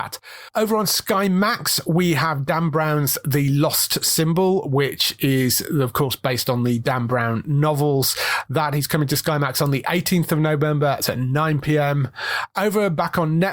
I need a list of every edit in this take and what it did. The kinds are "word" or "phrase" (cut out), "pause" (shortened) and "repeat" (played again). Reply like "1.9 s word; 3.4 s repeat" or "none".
11.0 s word